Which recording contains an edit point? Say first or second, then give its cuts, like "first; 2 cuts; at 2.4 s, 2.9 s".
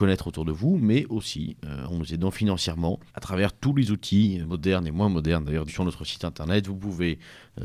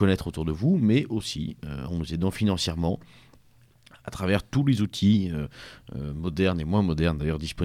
first; 3 cuts; at 3.1 s, 4.4 s, 5.7 s